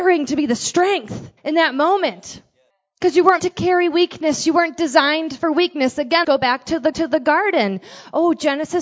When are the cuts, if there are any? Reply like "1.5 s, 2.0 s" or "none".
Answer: 1.4 s, 2.7 s, 3.4 s, 6.2 s, 6.9 s

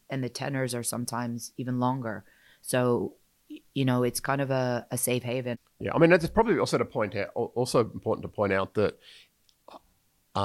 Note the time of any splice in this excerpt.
none

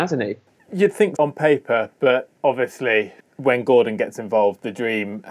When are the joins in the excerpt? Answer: 1.2 s

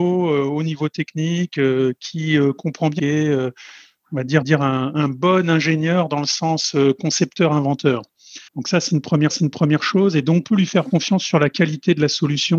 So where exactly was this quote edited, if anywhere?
3.0 s, 4.4 s, 8.5 s, 9.3 s, 10.4 s

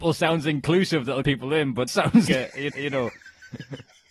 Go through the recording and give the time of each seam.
1.2 s, 1.9 s, 2.3 s, 2.7 s

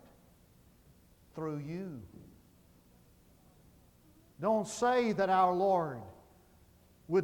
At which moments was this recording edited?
none

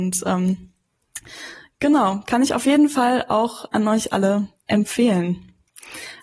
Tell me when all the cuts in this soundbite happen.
none

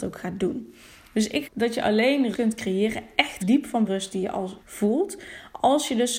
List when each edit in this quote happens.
1.4 s, 2.3 s, 3.4 s, 3.8 s, 4.6 s

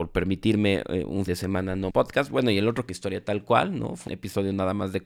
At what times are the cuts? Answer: 1.3 s, 1.9 s, 2.9 s, 4.1 s

